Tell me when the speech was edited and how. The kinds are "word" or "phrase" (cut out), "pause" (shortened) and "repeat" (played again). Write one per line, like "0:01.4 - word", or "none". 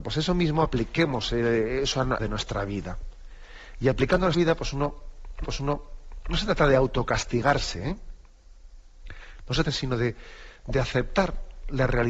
0:02.2 - phrase
0:04.3 - phrase
0:05.4 - repeat
0:09.6 - phrase